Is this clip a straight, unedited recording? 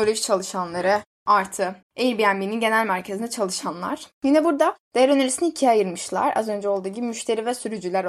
no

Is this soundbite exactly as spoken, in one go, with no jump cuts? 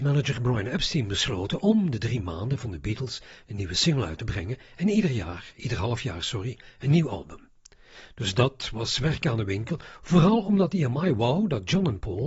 yes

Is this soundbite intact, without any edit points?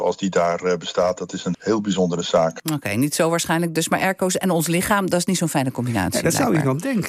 no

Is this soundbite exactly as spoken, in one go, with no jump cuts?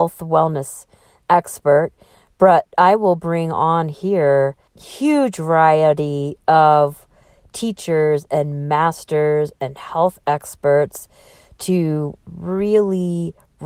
yes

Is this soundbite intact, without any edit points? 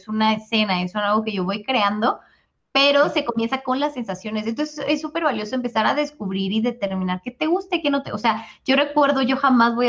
yes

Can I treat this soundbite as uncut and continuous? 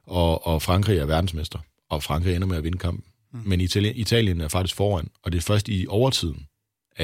yes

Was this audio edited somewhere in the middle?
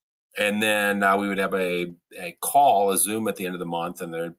no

